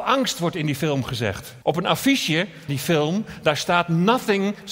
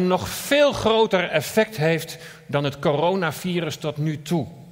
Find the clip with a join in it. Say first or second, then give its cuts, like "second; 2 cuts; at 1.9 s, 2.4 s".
first; 2 cuts; at 1.6 s, 2.7 s